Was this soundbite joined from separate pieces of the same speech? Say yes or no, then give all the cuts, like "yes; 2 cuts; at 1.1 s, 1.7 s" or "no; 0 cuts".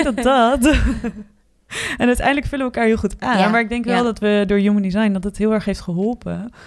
no; 0 cuts